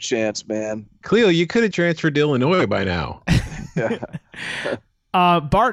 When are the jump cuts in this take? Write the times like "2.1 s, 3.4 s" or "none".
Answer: 1.7 s